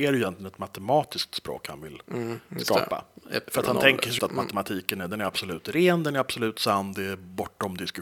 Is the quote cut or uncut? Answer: cut